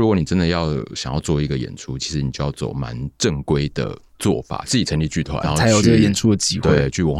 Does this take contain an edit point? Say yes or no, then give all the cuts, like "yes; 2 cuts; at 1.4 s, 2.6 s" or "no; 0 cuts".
yes; 1 cut; at 5.4 s